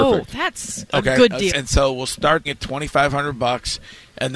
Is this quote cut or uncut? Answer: cut